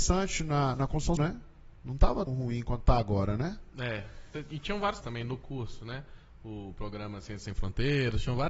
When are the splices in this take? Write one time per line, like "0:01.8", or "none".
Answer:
0:01.2
0:02.3
0:05.0